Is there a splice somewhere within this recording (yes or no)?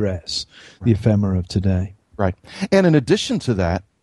no